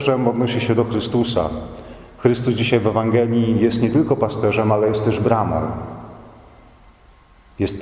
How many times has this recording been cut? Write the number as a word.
zero